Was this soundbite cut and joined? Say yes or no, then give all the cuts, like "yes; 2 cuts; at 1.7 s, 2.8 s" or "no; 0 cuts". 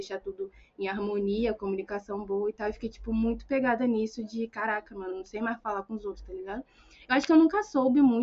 no; 0 cuts